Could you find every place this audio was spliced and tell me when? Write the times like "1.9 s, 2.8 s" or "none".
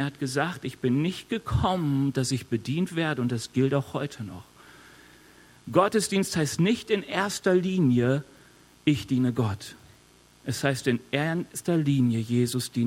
none

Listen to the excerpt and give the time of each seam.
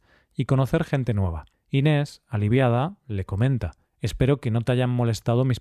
1.5 s, 3.9 s

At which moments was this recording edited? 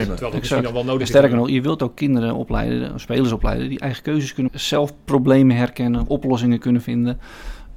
4.5 s

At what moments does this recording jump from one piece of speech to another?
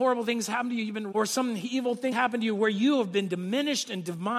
1.1 s, 2.1 s

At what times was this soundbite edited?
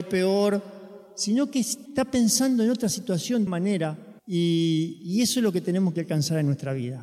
1.9 s, 3.5 s, 4.2 s

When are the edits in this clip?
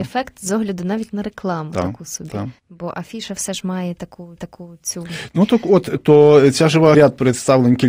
2.6 s, 4.4 s, 6.9 s

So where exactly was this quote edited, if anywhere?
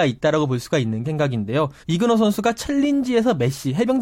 1.0 s, 1.8 s

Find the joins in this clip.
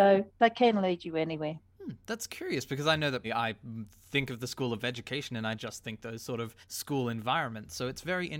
3.2 s, 5.6 s, 6.6 s

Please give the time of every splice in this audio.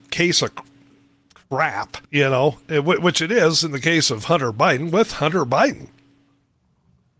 2.0 s

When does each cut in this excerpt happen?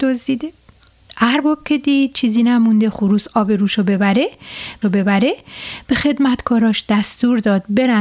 4.8 s

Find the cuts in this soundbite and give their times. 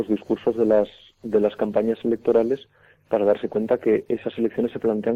none

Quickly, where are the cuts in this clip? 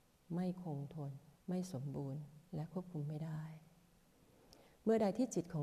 1.4 s, 2.5 s

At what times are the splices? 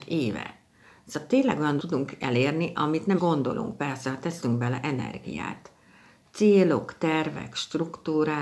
1.8 s, 3.2 s

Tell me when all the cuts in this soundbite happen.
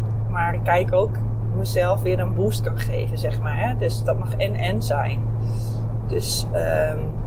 1.1 s

